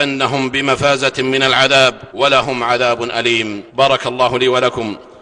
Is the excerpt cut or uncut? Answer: cut